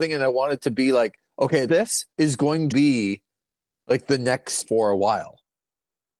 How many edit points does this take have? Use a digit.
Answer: 4